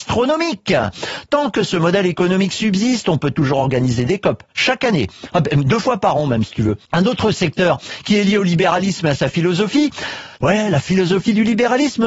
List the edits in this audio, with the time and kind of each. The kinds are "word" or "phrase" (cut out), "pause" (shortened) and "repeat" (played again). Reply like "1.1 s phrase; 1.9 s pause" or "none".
6.8 s pause; 10.4 s pause